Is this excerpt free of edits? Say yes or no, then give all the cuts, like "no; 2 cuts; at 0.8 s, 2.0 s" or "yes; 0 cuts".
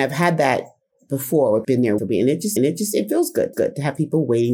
no; 4 cuts; at 1.6 s, 2.0 s, 2.6 s, 3.5 s